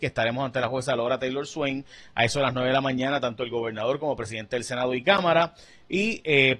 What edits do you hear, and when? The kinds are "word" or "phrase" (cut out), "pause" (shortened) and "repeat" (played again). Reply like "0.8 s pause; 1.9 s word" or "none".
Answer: none